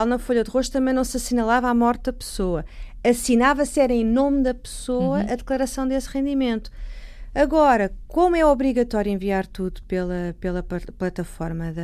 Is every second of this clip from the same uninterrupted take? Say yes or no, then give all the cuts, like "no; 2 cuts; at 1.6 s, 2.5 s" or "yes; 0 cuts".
yes; 0 cuts